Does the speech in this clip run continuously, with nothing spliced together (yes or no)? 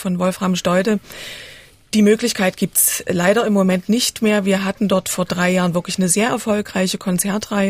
yes